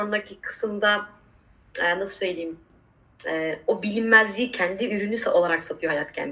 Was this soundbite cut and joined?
no; 0 cuts

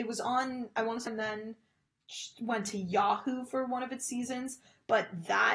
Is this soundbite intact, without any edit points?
no; 1 cut; at 1.1 s

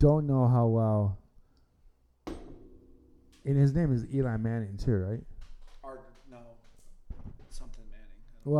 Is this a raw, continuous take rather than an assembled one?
yes; 0 cuts

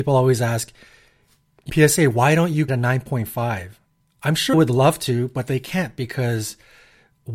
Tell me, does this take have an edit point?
yes; 3 cuts; at 1.7 s, 2.7 s, 4.5 s

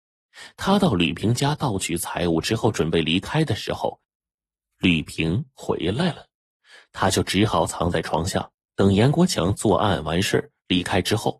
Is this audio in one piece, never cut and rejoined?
no; 1 cut; at 8.6 s

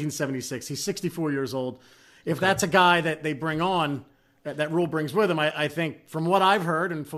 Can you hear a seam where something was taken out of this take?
no; 0 cuts

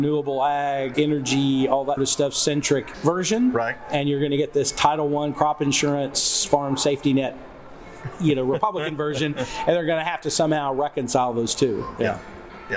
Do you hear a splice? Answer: yes; 3 cuts; at 0.9 s, 2.0 s, 2.9 s

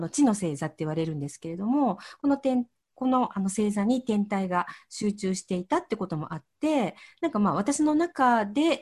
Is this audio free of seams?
yes; 0 cuts

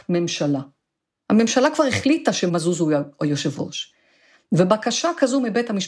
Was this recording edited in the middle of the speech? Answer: no; 0 cuts

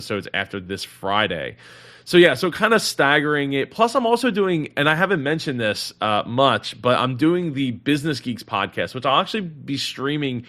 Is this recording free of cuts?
yes; 0 cuts

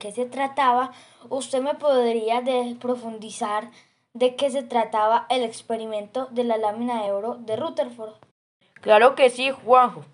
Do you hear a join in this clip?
no; 0 cuts

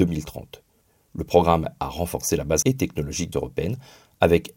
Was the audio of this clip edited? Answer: yes; 3 cuts; at 1.8 s, 2.6 s, 3.3 s

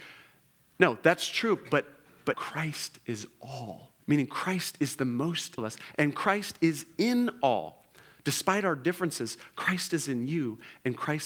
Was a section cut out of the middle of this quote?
yes; 3 cuts; at 2.3 s, 4.0 s, 5.6 s

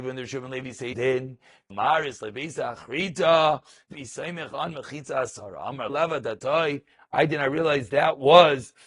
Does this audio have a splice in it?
yes; 4 cuts; at 0.9 s, 1.7 s, 3.9 s, 5.9 s

